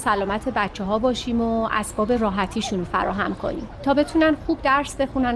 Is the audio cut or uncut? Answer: uncut